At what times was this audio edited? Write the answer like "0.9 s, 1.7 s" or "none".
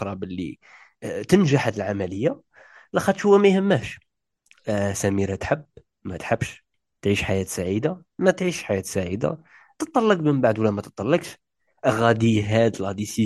none

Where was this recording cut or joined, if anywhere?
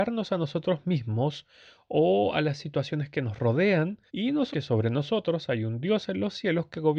4.1 s, 4.5 s

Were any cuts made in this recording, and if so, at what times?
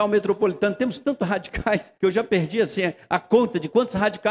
2.0 s

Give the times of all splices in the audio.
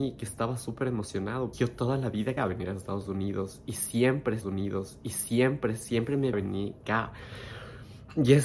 1.5 s, 2.4 s, 4.4 s, 6.3 s, 6.8 s

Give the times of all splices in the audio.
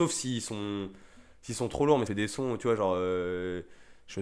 2.1 s

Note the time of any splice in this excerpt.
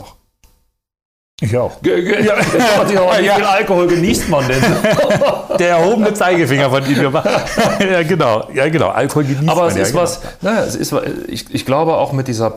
none

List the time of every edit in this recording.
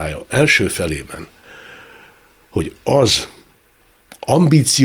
none

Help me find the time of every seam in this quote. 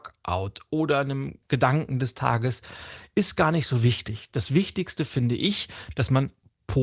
1.4 s

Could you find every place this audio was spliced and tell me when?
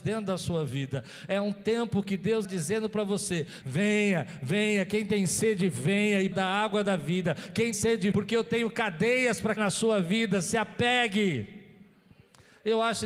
2.4 s, 3.6 s, 6.3 s, 7.7 s, 8.1 s, 9.6 s

